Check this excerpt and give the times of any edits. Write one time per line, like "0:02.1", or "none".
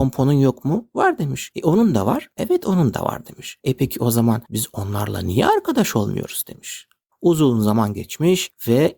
none